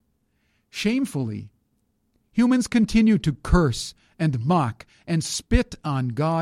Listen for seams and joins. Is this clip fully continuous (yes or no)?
yes